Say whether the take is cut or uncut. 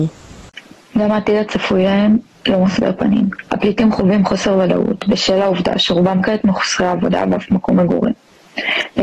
uncut